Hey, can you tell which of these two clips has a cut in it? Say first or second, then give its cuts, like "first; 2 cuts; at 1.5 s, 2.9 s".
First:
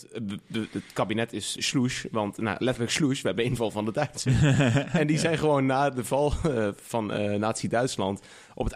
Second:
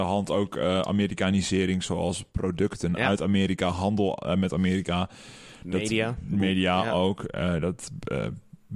first; 1 cut; at 1.6 s